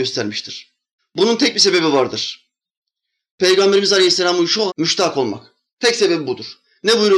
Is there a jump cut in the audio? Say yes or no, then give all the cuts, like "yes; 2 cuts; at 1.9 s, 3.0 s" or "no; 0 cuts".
yes; 2 cuts; at 1.0 s, 4.7 s